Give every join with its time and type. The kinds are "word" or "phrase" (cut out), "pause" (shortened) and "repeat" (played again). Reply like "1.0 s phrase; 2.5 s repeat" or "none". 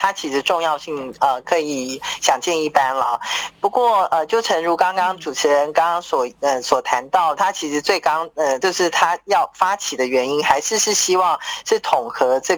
7.4 s phrase